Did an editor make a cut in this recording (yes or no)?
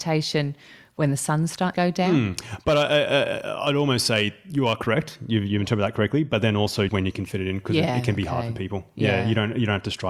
yes